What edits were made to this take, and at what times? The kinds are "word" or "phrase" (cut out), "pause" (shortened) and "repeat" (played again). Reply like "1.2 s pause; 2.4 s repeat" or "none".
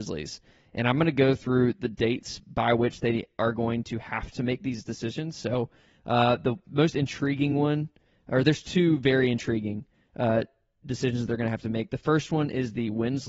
none

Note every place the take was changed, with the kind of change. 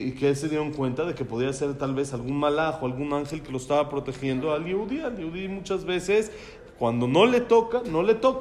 none

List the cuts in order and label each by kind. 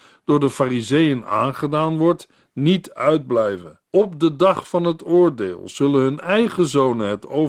3.9 s pause

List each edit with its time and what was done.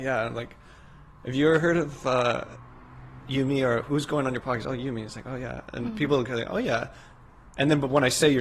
3.2 s word

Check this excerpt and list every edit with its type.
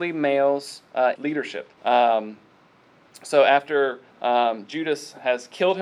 1.2 s phrase; 1.8 s pause; 4.1 s pause

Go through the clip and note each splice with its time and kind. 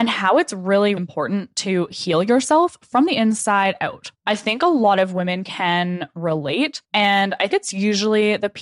1.0 s word; 4.1 s pause; 6.8 s pause; 7.5 s word

